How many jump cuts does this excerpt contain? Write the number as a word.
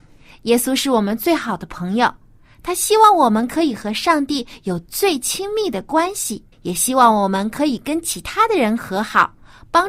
one